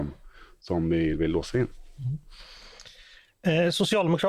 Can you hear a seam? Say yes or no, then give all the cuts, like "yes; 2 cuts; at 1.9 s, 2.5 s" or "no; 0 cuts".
no; 0 cuts